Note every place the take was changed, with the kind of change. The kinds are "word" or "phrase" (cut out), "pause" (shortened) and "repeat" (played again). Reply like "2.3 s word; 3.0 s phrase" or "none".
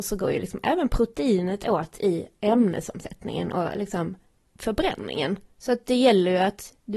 5.4 s pause